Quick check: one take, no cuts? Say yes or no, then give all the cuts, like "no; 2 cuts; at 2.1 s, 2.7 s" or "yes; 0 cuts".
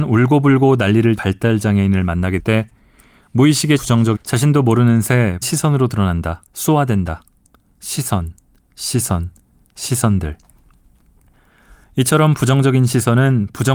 no; 6 cuts; at 1.2 s, 2.4 s, 3.8 s, 4.2 s, 5.4 s, 6.5 s